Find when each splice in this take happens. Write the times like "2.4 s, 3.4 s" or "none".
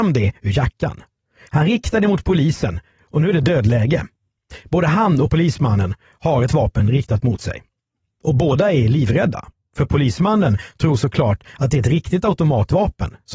none